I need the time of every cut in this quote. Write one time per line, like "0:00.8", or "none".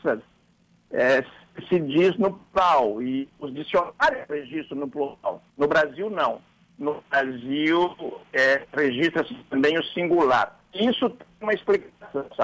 0:05.5